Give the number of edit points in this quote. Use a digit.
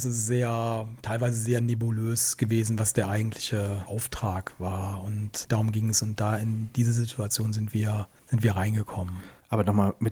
0